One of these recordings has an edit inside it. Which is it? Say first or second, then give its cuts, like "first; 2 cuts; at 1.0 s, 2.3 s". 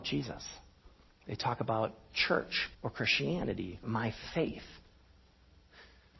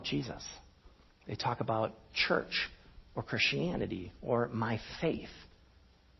first; 2 cuts; at 2.7 s, 3.8 s